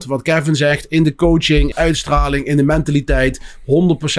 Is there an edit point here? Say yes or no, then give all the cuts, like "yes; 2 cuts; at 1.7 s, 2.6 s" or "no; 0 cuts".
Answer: yes; 1 cut; at 1.7 s